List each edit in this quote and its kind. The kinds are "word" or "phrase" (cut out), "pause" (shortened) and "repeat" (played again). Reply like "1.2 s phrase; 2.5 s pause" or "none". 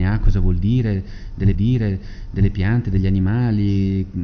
1.5 s repeat

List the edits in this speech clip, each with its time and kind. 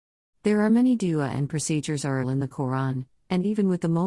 2.2 s word

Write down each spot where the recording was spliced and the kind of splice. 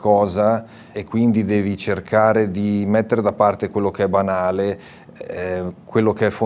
0.9 s word

